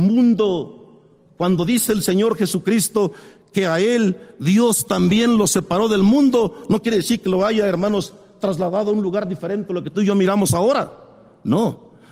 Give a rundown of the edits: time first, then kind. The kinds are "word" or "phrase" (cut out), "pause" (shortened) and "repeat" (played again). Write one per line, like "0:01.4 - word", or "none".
none